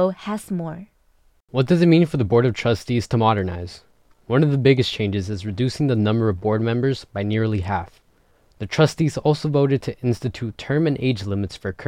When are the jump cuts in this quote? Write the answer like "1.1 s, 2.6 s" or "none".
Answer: none